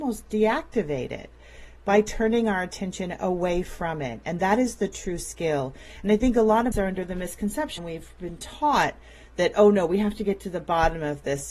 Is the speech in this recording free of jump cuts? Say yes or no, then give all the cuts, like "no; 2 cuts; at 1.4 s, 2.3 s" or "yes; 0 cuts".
no; 2 cuts; at 6.7 s, 7.8 s